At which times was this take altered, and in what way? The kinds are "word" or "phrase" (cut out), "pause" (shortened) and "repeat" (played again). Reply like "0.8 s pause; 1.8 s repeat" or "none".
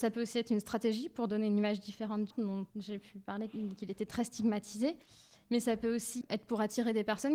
2.3 s word; 2.7 s pause